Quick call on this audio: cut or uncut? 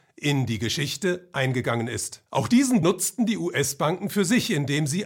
cut